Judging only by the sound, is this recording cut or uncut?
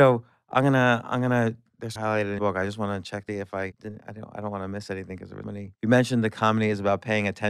cut